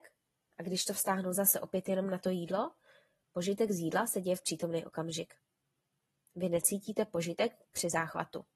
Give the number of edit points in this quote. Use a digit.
0